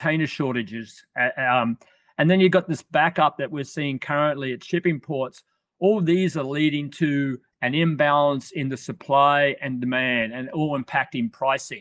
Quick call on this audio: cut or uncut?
uncut